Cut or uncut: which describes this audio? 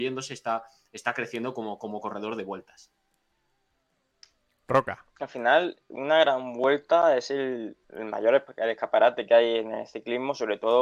cut